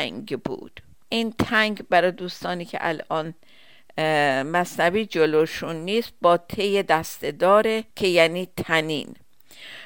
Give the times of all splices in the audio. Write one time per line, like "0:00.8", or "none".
0:01.0
0:07.9